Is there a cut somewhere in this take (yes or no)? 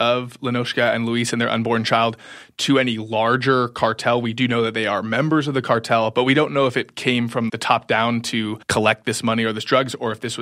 yes